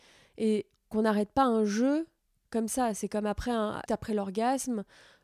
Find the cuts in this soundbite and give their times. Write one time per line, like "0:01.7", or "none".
0:00.9
0:03.9